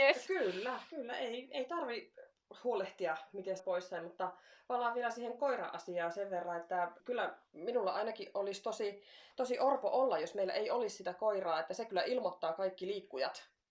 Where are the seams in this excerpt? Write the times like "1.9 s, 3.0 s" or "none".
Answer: 3.6 s, 7.0 s